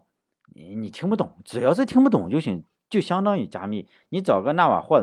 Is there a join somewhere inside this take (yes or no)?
no